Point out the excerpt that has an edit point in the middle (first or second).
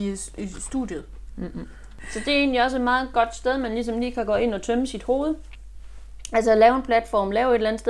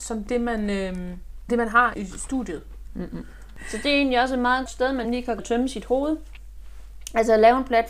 second